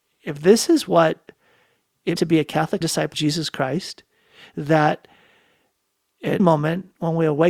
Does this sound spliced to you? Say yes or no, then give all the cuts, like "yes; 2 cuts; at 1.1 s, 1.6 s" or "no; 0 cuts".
yes; 4 cuts; at 2.2 s, 2.8 s, 3.1 s, 6.4 s